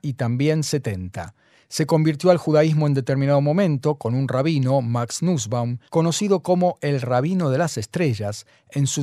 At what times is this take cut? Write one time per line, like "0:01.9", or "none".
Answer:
0:05.9